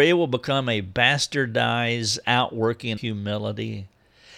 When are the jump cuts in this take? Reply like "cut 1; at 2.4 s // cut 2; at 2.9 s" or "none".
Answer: cut 1; at 3.0 s